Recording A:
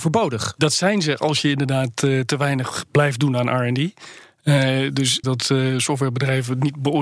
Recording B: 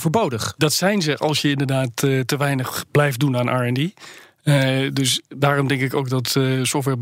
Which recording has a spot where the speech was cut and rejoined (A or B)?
A